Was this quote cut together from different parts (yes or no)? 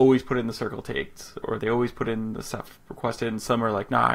no